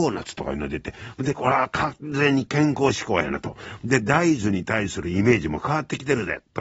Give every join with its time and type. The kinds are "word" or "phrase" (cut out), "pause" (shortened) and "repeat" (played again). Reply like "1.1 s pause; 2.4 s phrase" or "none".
none